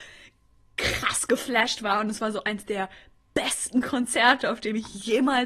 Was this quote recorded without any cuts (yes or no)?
yes